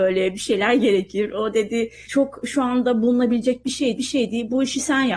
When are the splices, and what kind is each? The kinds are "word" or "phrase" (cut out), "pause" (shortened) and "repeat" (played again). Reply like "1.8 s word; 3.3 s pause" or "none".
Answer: 2.0 s pause; 4.0 s repeat